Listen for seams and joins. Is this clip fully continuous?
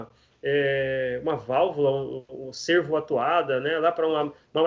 yes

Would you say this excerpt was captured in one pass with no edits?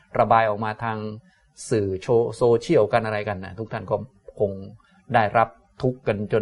yes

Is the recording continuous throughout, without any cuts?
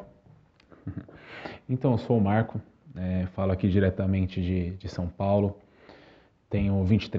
yes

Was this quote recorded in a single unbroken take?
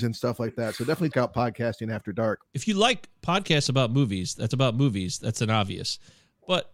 no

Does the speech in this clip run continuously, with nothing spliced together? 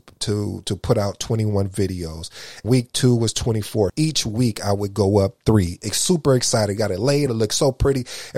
no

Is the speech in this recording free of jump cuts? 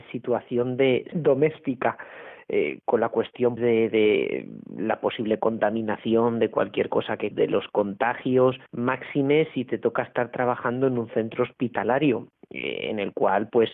no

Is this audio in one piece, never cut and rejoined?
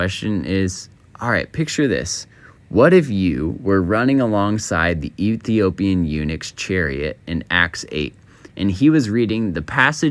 yes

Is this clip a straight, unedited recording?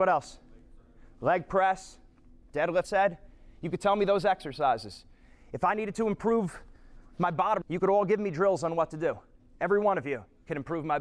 no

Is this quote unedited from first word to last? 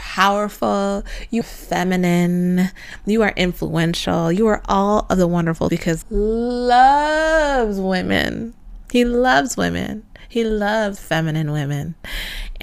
no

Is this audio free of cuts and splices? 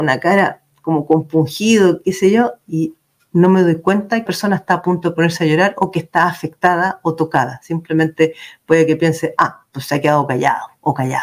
no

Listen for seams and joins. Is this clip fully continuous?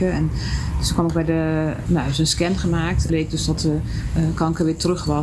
no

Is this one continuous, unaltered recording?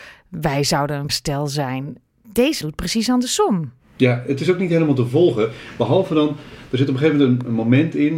no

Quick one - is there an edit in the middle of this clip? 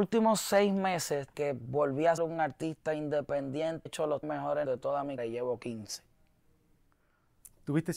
yes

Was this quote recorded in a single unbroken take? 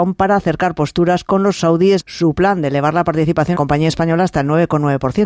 no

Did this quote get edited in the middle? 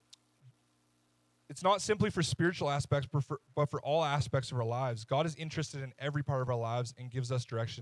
no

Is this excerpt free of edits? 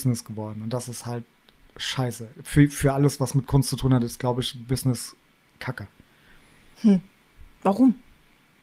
yes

